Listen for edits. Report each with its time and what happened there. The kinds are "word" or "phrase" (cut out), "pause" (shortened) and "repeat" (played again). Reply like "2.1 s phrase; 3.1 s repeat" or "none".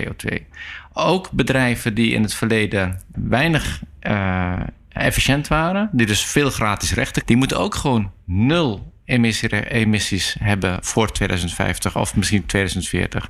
3.1 s word; 7.2 s word; 10.8 s word